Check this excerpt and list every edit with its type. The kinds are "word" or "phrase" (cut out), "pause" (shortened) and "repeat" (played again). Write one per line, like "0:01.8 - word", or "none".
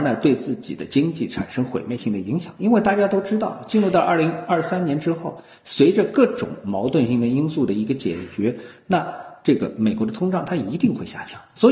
none